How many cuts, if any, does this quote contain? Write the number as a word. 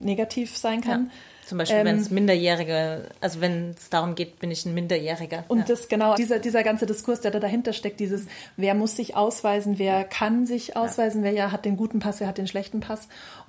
one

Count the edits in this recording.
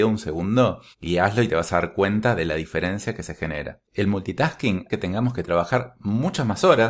three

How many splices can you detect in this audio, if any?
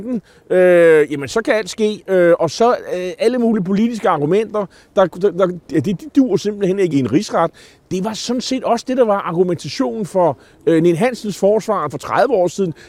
three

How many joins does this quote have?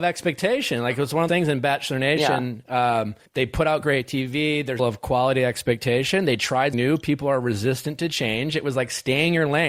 four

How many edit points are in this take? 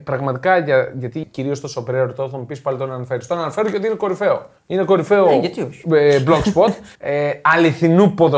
three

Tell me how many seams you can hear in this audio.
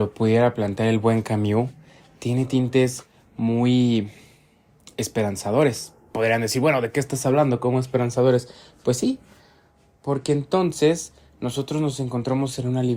zero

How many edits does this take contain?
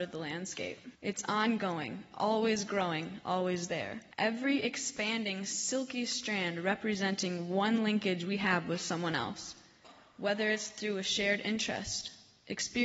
two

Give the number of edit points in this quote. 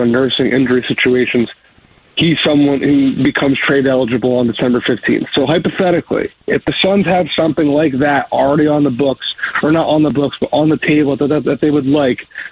zero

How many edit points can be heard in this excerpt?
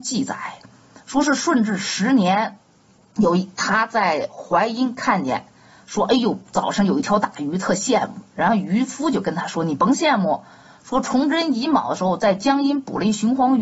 zero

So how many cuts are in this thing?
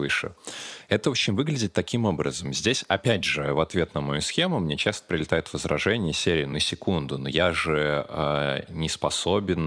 zero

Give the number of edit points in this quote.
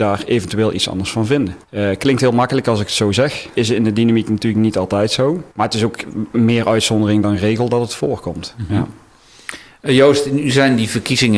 three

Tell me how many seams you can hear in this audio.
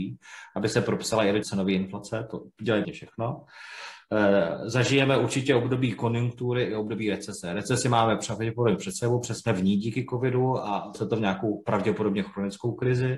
three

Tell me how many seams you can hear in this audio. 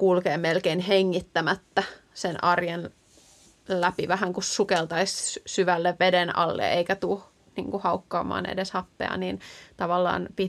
zero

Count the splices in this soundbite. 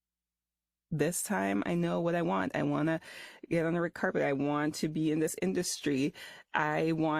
zero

